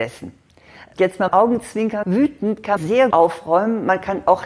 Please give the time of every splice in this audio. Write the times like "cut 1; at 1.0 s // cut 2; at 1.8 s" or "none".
cut 1; at 1.3 s // cut 2; at 2.0 s // cut 3; at 2.8 s // cut 4; at 3.1 s